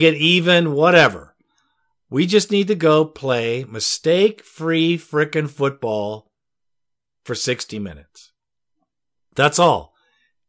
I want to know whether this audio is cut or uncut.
uncut